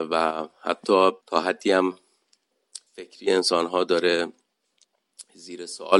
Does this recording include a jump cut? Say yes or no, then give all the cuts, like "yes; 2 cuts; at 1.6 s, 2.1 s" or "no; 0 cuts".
yes; 2 cuts; at 1.2 s, 2.9 s